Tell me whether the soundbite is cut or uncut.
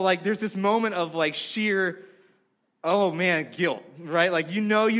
uncut